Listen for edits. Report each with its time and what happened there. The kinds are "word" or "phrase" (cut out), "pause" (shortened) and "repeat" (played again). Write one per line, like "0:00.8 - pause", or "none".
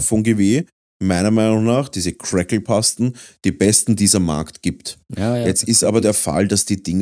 none